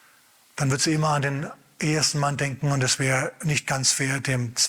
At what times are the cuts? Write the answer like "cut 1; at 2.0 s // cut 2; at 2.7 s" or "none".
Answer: none